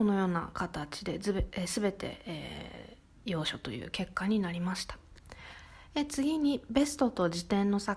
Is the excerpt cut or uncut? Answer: uncut